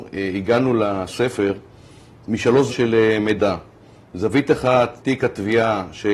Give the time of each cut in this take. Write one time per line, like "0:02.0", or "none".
0:02.7
0:05.0